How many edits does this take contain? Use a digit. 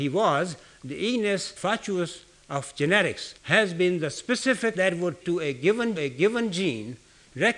5